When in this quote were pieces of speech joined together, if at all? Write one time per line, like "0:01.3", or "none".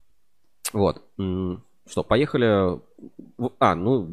none